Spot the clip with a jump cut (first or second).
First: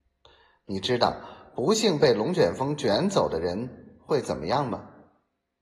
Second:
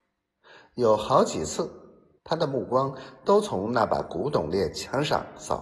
second